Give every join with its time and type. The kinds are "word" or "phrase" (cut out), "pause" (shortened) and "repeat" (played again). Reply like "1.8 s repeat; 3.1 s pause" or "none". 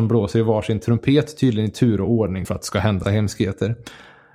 2.4 s word; 3.0 s word